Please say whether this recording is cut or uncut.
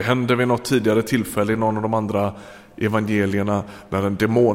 uncut